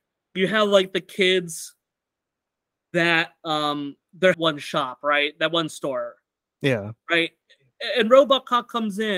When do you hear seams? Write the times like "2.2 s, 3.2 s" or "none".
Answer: 4.3 s